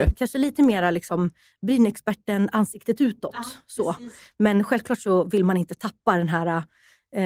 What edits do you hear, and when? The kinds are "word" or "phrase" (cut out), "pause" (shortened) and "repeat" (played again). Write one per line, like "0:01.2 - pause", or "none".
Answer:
none